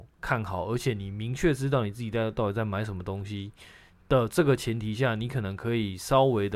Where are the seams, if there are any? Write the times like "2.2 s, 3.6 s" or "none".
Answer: none